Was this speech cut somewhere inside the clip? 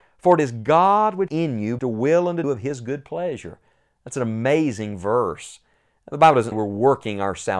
yes; 4 cuts; at 1.3 s, 1.8 s, 2.4 s, 6.5 s

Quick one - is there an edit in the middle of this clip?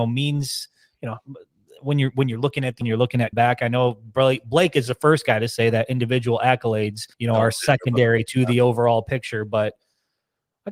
yes; 3 cuts; at 2.8 s, 3.3 s, 7.1 s

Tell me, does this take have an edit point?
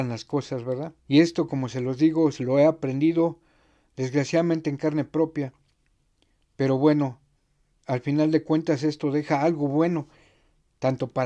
yes; 1 cut; at 1.0 s

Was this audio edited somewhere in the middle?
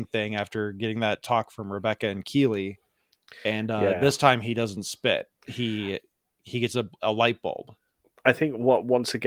no; 0 cuts

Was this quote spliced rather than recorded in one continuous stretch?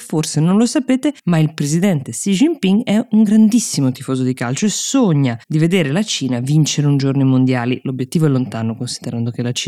yes; 2 cuts; at 1.2 s, 5.4 s

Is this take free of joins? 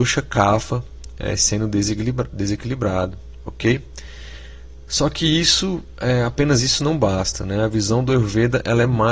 yes; 0 cuts

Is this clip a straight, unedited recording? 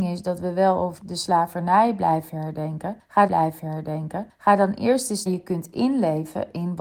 no; 3 cuts; at 1.0 s, 3.3 s, 5.3 s

